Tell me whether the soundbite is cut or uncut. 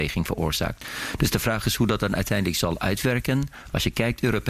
uncut